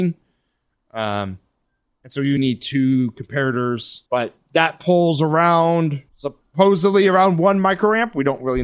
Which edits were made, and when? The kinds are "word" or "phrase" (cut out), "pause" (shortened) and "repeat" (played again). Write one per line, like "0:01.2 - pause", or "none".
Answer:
0:02.4 - word
0:04.1 - pause
0:06.1 - pause